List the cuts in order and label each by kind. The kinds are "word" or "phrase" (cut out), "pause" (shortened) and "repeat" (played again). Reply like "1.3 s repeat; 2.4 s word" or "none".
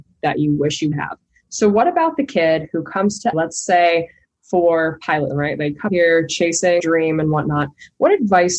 0.9 s word; 3.3 s word; 5.3 s word; 5.9 s word; 6.8 s word